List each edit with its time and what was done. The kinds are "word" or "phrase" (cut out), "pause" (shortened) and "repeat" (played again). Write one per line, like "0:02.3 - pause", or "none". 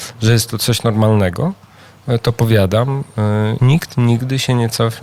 0:03.6 - word